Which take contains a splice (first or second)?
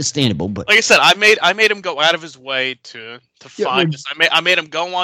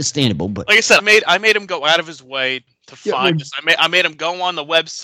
second